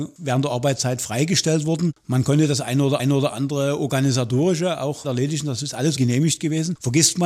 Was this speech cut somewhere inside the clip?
yes; 3 cuts; at 3.0 s, 5.0 s, 6.0 s

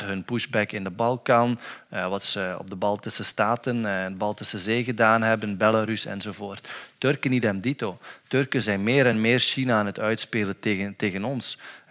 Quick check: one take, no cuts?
yes; 0 cuts

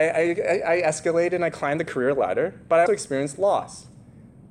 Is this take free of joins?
no; 1 cut; at 2.9 s

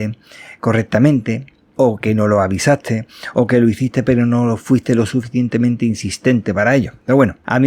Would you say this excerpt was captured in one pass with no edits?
yes; 0 cuts

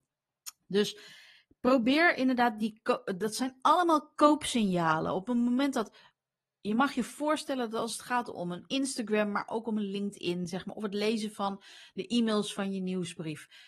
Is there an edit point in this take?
no; 0 cuts

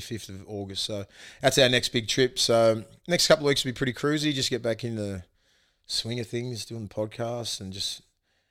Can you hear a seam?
no; 0 cuts

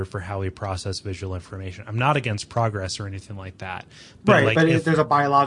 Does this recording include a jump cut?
no; 0 cuts

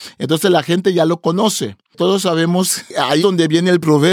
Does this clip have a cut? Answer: yes; 1 cut; at 3.2 s

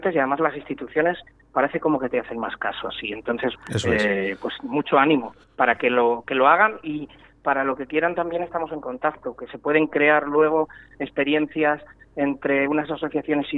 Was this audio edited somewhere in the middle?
yes; 2 cuts; at 3.6 s, 5.4 s

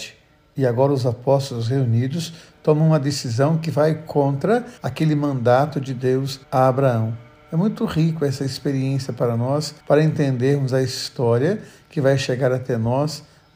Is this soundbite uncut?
no; 4 cuts; at 4.8 s, 6.4 s, 7.4 s, 9.8 s

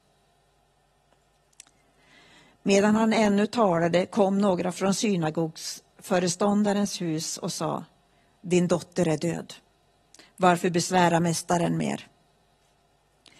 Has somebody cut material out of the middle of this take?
no; 0 cuts

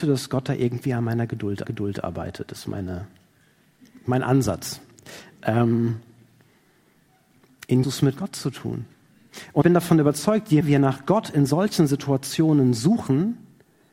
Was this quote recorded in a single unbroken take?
no; 4 cuts; at 1.6 s, 7.8 s, 9.6 s, 10.6 s

